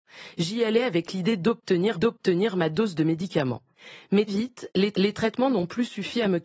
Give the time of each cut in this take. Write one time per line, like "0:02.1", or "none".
0:01.9
0:04.3
0:04.9